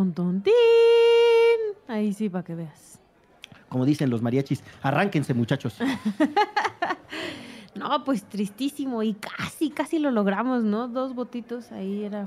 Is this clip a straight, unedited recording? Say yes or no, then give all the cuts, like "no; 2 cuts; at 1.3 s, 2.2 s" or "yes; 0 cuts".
yes; 0 cuts